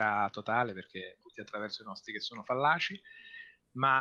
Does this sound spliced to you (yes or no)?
yes